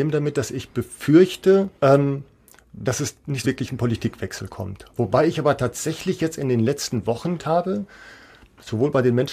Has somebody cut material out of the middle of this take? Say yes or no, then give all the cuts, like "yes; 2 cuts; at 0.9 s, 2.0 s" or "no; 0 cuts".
yes; 3 cuts; at 1.8 s, 3.4 s, 7.4 s